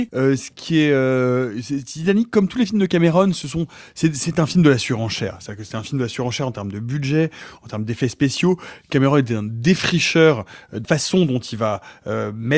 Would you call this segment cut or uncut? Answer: cut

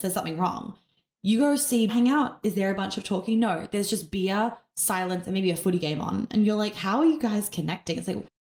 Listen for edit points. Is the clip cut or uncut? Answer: cut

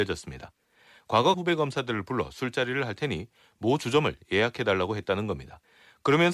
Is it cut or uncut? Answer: cut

